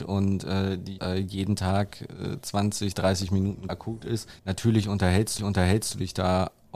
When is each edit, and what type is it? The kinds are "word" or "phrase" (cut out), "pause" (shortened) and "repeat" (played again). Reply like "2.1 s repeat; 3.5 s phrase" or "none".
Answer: 1.0 s word; 3.7 s phrase; 4.4 s pause; 5.4 s repeat